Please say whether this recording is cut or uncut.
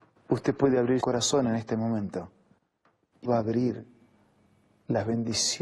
cut